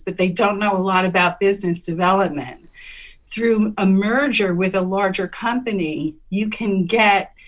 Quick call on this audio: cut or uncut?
uncut